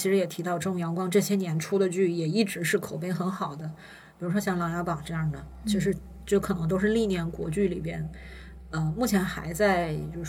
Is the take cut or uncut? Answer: uncut